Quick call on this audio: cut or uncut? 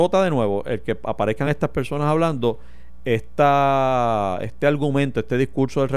uncut